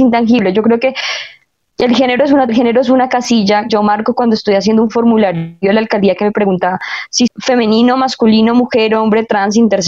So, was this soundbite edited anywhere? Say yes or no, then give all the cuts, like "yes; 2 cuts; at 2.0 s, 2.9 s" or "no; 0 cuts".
yes; 3 cuts; at 2.5 s, 3.7 s, 7.3 s